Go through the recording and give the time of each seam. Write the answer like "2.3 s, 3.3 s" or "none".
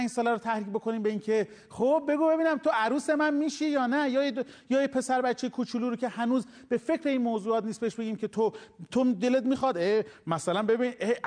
none